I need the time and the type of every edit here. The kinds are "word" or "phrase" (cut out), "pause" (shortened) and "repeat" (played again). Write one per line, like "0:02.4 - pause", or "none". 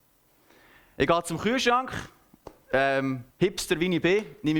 0:03.3 - pause